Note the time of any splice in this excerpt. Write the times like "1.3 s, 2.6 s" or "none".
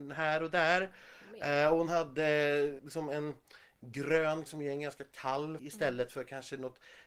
2.8 s, 4.5 s, 5.6 s